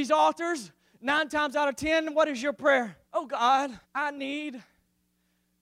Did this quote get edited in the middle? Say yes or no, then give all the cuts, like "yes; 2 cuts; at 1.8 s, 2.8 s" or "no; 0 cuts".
yes; 2 cuts; at 3.0 s, 3.8 s